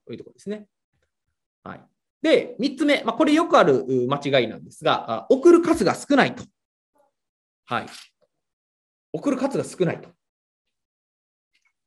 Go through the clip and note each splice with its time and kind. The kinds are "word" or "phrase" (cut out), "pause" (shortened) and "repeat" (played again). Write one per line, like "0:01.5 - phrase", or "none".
none